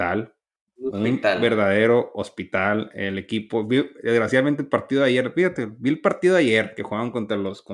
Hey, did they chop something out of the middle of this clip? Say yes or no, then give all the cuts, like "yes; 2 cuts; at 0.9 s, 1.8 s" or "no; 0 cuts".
no; 0 cuts